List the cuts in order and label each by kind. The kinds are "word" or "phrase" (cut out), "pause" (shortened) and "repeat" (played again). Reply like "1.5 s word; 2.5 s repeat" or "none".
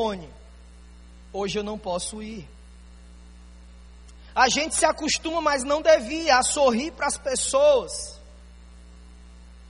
none